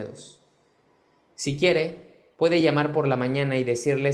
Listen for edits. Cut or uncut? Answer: uncut